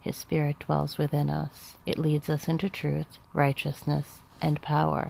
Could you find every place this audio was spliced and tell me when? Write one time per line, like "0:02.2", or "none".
0:01.8
0:03.2